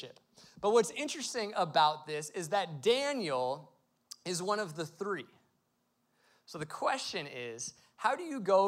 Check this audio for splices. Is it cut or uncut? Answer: uncut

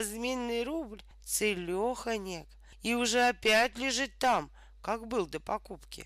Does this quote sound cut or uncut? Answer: uncut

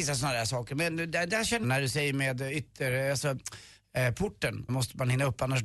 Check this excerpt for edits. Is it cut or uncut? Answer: cut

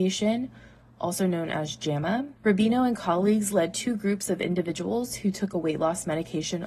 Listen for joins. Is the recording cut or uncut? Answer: cut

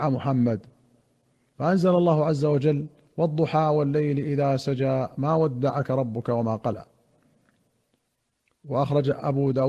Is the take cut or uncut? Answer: cut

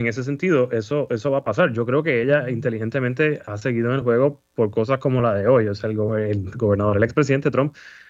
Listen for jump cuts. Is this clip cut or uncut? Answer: uncut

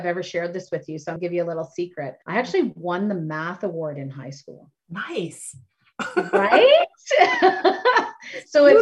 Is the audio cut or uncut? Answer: cut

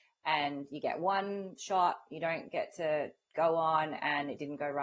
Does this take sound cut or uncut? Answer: uncut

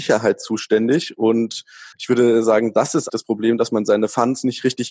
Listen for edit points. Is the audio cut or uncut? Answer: cut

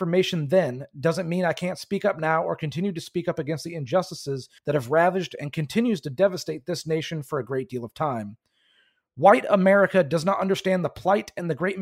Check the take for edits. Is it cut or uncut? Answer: cut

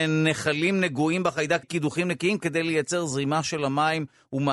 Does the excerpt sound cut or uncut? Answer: cut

